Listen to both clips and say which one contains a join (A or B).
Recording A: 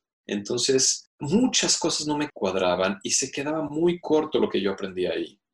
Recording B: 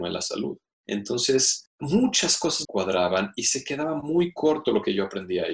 B